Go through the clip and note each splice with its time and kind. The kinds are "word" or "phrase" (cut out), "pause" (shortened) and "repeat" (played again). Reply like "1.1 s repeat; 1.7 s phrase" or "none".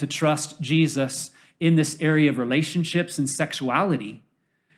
none